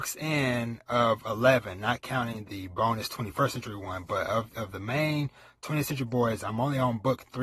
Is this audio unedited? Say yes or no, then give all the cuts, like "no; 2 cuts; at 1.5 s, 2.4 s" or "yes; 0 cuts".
no; 1 cut; at 2.5 s